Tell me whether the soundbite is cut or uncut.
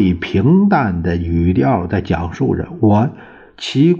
uncut